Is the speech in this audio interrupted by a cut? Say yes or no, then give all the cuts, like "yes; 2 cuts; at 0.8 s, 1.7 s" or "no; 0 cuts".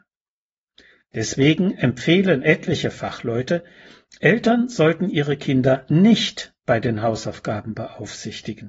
no; 0 cuts